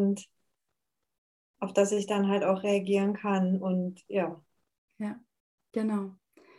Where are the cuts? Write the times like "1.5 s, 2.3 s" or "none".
none